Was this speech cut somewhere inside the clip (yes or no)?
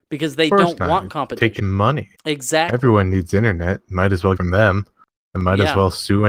yes